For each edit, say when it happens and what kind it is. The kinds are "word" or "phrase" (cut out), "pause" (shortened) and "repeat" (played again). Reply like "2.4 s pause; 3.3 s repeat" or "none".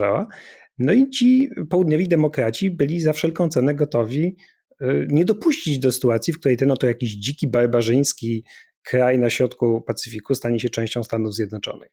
none